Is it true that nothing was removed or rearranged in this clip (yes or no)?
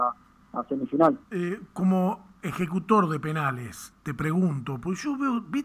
no